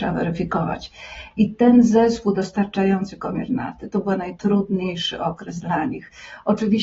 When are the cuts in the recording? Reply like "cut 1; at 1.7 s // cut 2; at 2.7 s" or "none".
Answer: none